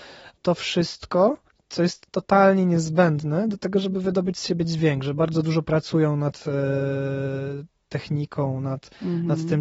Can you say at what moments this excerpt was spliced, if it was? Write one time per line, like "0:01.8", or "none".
0:01.5